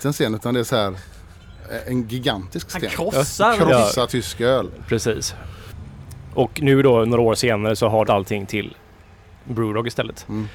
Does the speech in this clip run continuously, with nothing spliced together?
no; 2 cuts; at 8.0 s, 9.4 s

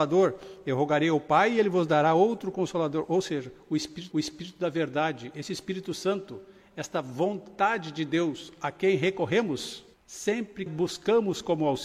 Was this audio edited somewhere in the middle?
yes; 3 cuts; at 4.1 s, 9.9 s, 10.7 s

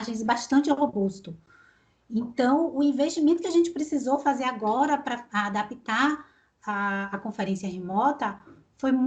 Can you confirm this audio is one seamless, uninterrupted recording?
yes; 0 cuts

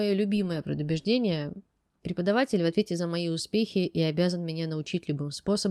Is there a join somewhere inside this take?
no; 0 cuts

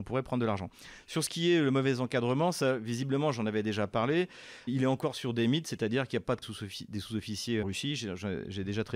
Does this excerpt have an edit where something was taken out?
yes; 3 cuts; at 4.7 s, 6.4 s, 7.6 s

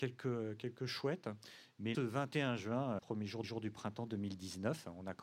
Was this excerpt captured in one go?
no; 3 cuts; at 1.9 s, 3.0 s, 3.4 s

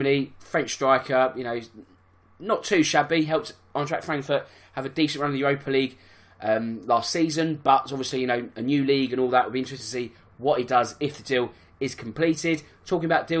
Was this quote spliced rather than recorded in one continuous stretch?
no; 0 cuts

